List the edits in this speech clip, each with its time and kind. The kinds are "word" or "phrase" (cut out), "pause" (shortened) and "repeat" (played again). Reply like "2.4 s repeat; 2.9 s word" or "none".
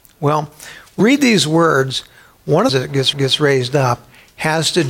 1.0 s word; 2.7 s phrase; 3.1 s repeat